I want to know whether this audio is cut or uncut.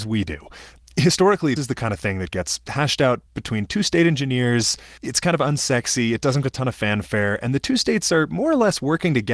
cut